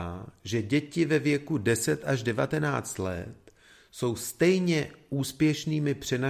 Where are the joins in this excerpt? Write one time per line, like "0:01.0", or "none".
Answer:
none